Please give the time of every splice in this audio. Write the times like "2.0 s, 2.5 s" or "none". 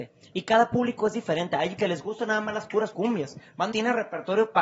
1.8 s, 2.9 s, 3.7 s